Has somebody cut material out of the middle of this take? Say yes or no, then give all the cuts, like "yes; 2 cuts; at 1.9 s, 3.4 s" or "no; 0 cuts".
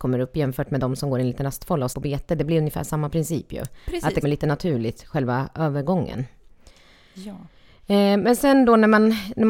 yes; 2 cuts; at 1.9 s, 4.2 s